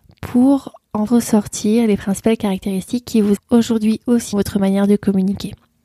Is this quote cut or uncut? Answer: cut